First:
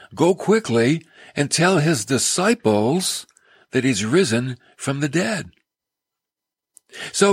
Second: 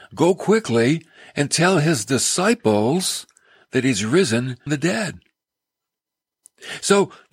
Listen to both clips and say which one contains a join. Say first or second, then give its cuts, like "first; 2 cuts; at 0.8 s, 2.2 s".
second; 1 cut; at 4.7 s